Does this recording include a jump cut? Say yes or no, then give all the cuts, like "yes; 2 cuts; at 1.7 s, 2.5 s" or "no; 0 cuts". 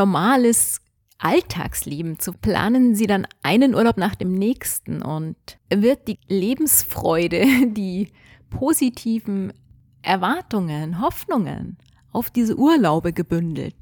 yes; 3 cuts; at 2.3 s, 5.6 s, 6.1 s